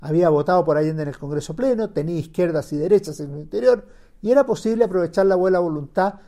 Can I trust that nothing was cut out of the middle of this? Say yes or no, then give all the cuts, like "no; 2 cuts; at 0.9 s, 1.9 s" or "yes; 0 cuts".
yes; 0 cuts